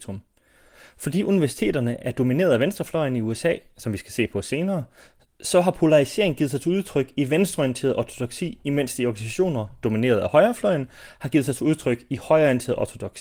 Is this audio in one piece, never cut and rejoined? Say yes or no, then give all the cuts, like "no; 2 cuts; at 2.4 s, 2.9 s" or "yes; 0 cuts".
yes; 0 cuts